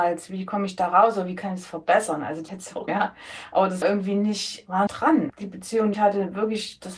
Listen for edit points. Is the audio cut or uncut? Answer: cut